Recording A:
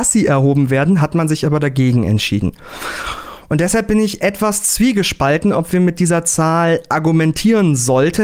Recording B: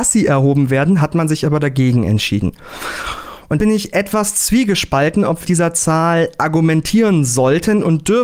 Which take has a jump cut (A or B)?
B